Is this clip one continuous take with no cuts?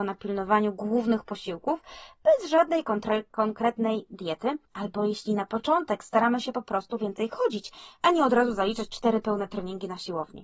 no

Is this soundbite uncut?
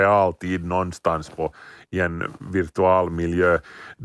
yes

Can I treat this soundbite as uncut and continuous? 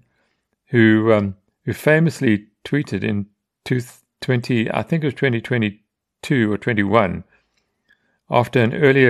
yes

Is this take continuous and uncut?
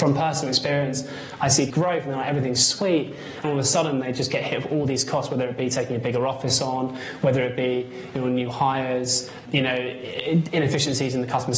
no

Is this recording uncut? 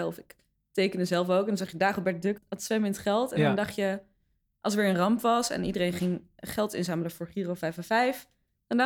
no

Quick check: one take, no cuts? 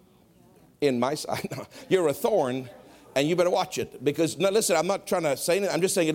yes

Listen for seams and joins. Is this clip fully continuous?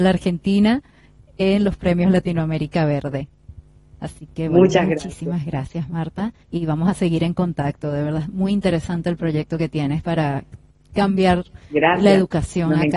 yes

